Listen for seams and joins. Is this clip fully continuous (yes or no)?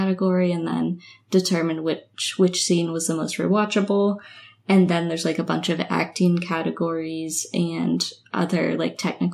yes